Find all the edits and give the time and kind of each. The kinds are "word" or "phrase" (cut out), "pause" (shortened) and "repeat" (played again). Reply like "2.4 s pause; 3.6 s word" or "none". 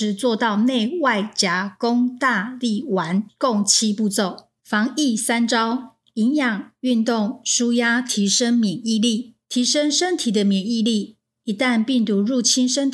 4.6 s pause; 9.4 s pause